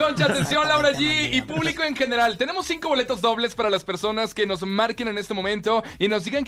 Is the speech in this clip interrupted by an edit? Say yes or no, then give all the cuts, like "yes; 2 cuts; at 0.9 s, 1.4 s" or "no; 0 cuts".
no; 0 cuts